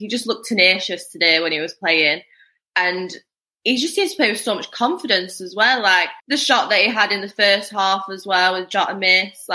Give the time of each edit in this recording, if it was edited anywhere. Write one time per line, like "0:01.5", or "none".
0:06.2